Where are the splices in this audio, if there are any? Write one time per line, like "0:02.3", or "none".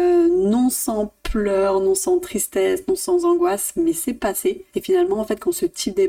0:04.7